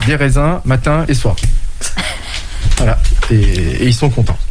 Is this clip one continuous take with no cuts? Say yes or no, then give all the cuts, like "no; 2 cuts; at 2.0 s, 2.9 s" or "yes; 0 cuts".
no; 1 cut; at 1.1 s